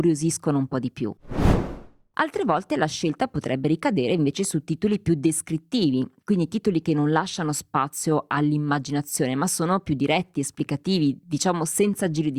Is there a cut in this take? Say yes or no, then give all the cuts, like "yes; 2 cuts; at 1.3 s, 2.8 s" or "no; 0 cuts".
no; 0 cuts